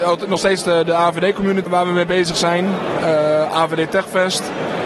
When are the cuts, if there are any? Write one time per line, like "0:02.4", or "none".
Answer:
0:01.7